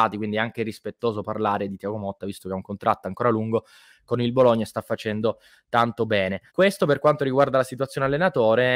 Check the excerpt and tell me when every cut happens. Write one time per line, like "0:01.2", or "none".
0:06.5